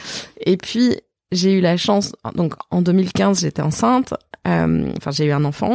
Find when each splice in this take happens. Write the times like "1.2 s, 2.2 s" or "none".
none